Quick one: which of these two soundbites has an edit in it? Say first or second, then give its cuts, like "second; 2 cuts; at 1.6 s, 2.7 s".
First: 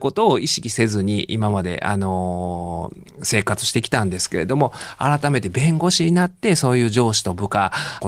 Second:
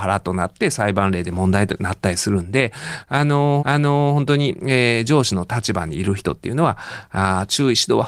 second; 1 cut; at 3.6 s